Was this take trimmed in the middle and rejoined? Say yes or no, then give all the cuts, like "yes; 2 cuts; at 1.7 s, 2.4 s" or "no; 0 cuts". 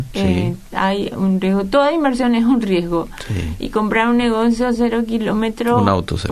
no; 0 cuts